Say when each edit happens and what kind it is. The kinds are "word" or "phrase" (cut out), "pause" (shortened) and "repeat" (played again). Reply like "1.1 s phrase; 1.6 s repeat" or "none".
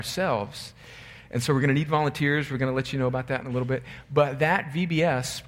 none